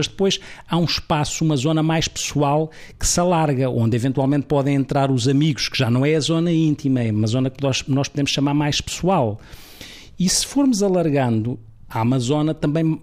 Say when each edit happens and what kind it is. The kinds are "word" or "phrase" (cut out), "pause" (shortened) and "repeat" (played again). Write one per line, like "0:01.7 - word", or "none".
none